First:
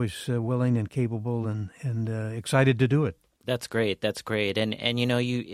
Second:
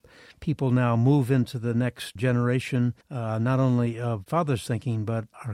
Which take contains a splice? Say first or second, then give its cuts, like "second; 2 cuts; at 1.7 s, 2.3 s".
second; 3 cuts; at 2.2 s, 3.0 s, 4.3 s